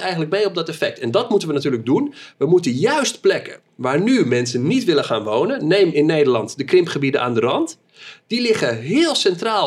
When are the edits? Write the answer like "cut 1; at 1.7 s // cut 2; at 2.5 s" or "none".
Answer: none